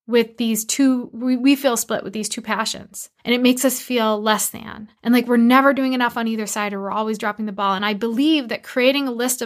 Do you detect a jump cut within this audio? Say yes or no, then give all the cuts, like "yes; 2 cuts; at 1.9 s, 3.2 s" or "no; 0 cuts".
yes; 2 cuts; at 3.2 s, 5.0 s